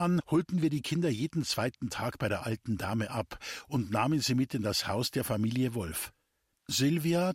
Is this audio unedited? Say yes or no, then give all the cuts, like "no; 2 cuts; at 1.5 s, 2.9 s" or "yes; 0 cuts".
yes; 0 cuts